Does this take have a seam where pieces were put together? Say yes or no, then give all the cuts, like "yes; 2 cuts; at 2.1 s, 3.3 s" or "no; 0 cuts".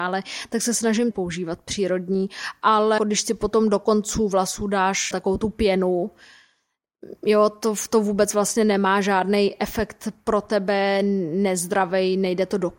yes; 3 cuts; at 1.1 s, 3.0 s, 5.1 s